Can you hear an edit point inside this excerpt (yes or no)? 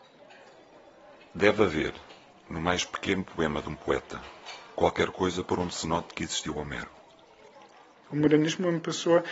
no